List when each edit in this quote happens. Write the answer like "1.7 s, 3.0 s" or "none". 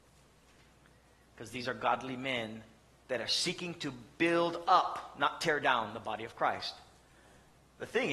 none